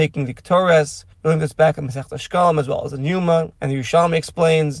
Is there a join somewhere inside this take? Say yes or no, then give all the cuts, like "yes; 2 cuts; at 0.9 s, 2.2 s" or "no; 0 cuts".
yes; 2 cuts; at 1.1 s, 3.6 s